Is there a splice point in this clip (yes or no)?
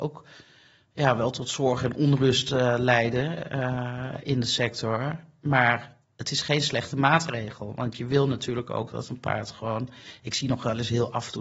yes